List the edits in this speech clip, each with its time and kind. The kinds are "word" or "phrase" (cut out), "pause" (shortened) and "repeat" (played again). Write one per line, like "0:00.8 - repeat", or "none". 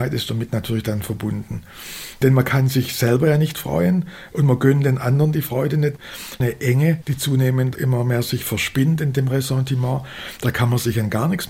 none